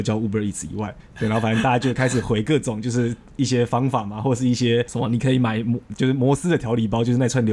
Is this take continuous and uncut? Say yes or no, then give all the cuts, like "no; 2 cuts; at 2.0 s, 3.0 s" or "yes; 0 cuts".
yes; 0 cuts